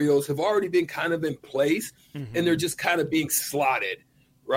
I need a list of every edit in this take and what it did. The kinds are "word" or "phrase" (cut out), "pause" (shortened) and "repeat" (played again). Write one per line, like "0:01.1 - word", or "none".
none